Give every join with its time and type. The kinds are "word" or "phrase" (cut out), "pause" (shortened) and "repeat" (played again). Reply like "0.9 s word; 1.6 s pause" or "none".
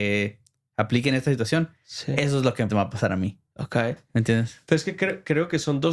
2.7 s word